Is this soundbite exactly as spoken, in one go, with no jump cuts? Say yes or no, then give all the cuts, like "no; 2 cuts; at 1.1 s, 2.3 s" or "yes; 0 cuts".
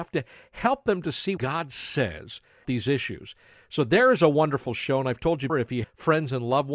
no; 4 cuts; at 1.4 s, 2.6 s, 5.5 s, 5.8 s